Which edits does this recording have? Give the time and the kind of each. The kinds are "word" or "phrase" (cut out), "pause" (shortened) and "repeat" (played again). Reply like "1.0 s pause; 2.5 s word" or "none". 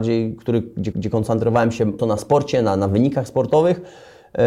0.9 s repeat; 2.0 s word